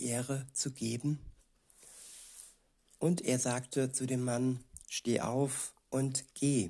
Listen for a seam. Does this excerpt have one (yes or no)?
no